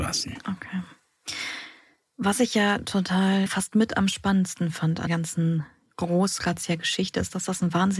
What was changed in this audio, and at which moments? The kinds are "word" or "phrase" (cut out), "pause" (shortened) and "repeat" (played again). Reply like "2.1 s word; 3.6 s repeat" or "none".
3.5 s word; 5.1 s word